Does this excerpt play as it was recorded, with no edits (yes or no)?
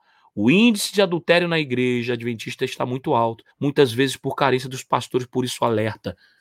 no